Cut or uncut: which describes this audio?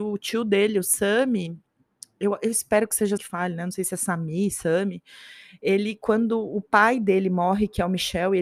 cut